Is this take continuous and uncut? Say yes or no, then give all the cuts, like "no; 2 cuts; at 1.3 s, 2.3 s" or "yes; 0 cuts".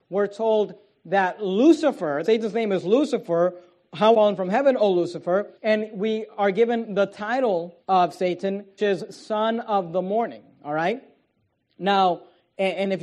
no; 5 cuts; at 2.2 s, 4.1 s, 5.5 s, 7.8 s, 8.8 s